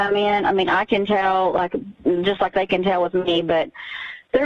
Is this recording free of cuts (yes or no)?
yes